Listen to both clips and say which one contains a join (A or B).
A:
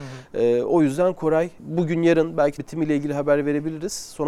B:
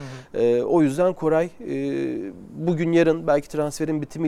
A